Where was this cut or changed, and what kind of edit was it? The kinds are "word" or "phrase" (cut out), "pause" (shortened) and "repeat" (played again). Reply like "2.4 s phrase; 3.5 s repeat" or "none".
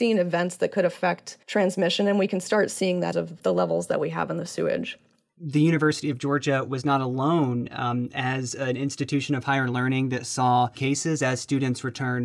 1.4 s pause; 3.1 s phrase; 10.8 s phrase